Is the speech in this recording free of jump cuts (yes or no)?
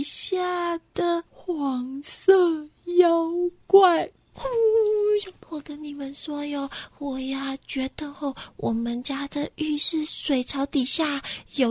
no